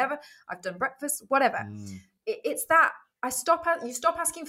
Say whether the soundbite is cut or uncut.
uncut